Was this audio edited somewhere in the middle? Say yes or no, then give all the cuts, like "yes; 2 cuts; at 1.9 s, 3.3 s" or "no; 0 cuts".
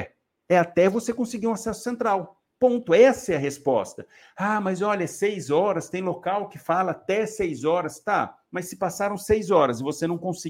no; 0 cuts